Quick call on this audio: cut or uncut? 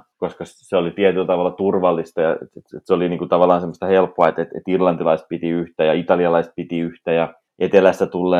uncut